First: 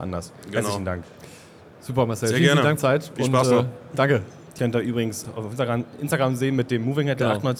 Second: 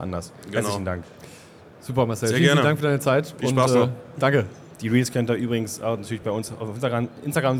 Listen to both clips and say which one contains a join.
first; 3 cuts; at 2.8 s, 4.6 s, 5.2 s

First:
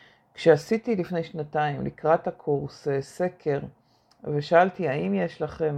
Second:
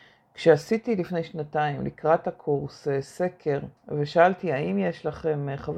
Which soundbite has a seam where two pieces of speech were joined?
second; 1 cut; at 3.8 s

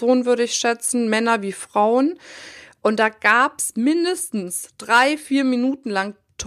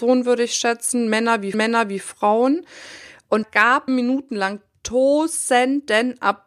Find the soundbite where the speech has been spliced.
second; 3 cuts; at 1.5 s, 3.4 s, 3.9 s

